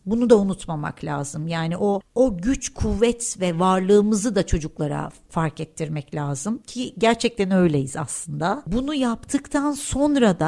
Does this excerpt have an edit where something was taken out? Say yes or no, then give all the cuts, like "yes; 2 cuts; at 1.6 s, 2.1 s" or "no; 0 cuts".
no; 0 cuts